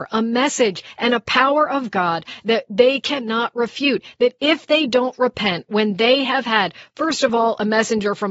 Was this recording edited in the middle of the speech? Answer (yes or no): no